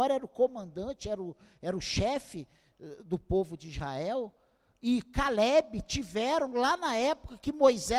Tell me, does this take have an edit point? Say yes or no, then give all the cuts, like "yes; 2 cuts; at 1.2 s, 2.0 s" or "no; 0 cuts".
no; 0 cuts